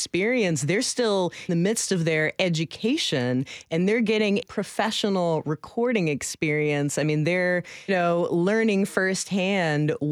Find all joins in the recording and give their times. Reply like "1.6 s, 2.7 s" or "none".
1.5 s, 4.4 s, 7.9 s